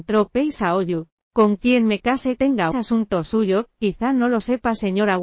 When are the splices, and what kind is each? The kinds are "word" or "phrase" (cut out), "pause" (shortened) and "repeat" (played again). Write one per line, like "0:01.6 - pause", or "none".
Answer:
0:02.4 - phrase
0:02.7 - phrase